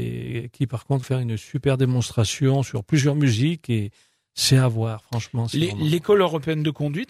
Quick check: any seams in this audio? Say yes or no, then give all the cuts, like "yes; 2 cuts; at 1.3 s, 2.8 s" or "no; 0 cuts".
yes; 1 cut; at 1.0 s